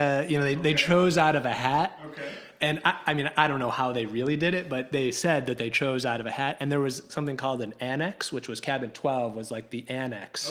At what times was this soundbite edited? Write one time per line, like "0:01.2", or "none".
none